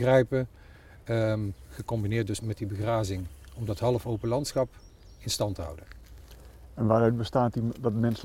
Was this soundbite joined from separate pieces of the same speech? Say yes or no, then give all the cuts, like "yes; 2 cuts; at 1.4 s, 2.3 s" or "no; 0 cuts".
yes; 1 cut; at 2.4 s